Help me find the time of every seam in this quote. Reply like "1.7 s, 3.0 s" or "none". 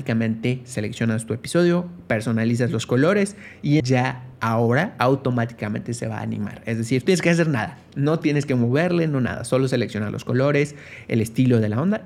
3.8 s, 7.1 s